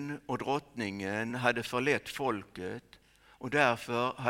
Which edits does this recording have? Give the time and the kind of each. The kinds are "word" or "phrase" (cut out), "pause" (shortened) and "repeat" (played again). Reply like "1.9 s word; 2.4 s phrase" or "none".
none